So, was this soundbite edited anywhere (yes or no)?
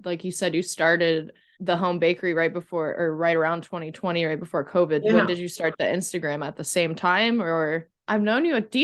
no